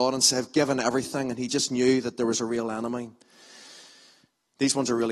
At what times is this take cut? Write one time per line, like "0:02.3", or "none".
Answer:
none